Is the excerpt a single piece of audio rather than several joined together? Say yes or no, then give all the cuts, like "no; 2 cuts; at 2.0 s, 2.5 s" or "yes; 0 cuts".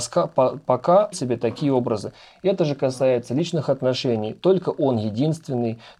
no; 1 cut; at 1.1 s